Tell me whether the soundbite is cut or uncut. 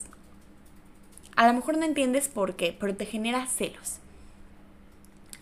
uncut